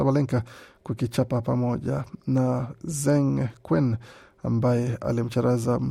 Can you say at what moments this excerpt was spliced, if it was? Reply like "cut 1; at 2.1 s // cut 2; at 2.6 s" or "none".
none